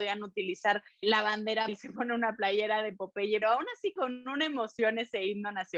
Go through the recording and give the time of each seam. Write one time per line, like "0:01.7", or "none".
0:01.0
0:01.7
0:03.4
0:04.0